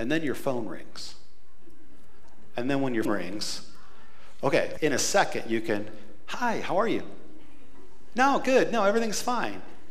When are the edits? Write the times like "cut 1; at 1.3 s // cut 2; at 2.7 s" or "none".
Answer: cut 1; at 3.0 s // cut 2; at 4.8 s